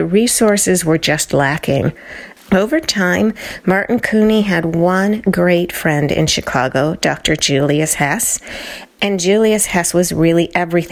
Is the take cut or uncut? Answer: uncut